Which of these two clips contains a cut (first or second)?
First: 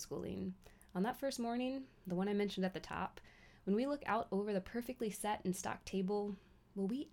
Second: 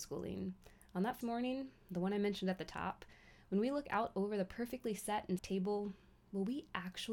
second